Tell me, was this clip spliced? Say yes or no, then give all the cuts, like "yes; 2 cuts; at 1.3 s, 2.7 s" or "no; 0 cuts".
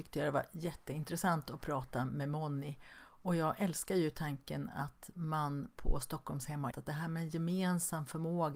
yes; 1 cut; at 6.7 s